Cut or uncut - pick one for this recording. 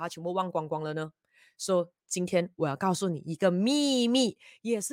uncut